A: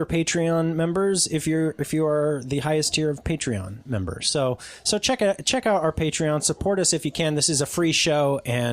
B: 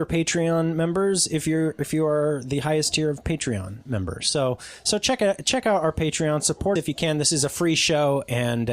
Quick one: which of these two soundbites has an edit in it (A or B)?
B